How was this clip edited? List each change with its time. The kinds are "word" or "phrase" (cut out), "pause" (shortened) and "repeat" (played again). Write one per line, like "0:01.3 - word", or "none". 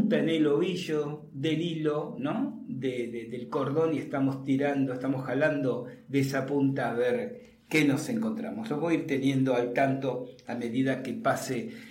none